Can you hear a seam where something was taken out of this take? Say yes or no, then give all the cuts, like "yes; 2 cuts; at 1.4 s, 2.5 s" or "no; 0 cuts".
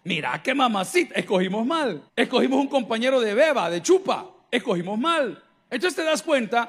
yes; 1 cut; at 2.1 s